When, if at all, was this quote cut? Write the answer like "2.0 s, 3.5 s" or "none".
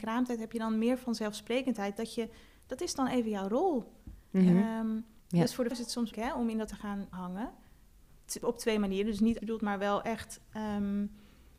5.7 s, 6.1 s, 6.7 s, 7.1 s, 8.4 s, 9.4 s